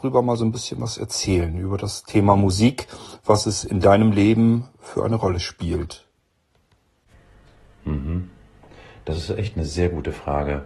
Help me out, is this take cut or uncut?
uncut